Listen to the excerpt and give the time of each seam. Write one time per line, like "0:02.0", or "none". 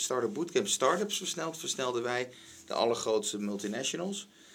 none